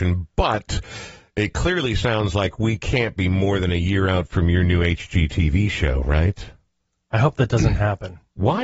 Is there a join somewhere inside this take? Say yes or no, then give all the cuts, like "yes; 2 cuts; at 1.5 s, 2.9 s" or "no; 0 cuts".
no; 0 cuts